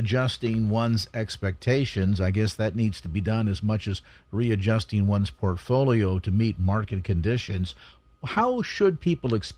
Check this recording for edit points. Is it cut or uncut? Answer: uncut